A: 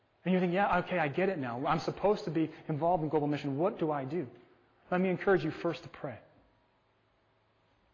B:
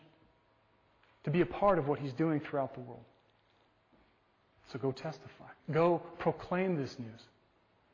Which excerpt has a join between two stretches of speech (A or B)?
B